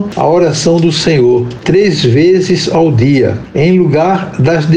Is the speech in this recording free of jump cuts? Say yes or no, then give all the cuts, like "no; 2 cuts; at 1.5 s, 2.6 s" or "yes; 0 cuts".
yes; 0 cuts